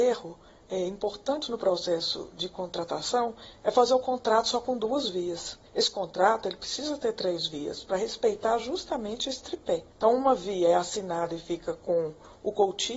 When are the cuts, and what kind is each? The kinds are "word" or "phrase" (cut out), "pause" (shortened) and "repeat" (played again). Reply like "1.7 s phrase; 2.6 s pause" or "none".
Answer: 5.7 s pause; 9.9 s pause